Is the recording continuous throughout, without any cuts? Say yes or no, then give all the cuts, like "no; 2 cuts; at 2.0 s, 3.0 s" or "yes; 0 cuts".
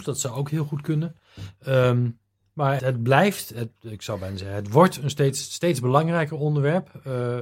no; 1 cut; at 2.8 s